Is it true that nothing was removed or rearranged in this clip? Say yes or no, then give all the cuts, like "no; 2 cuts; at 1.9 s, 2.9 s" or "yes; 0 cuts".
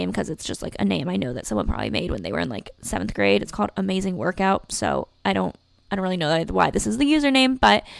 yes; 0 cuts